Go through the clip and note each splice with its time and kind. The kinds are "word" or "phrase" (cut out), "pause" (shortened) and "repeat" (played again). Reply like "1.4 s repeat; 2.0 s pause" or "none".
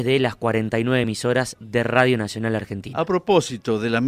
none